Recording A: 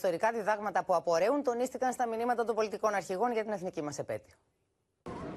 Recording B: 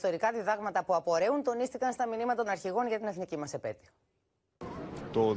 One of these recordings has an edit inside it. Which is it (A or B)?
B